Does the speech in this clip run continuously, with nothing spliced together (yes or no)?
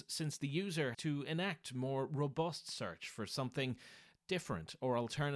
no